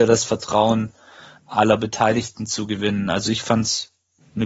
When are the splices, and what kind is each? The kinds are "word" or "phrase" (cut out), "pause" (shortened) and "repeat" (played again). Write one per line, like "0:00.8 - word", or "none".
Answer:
none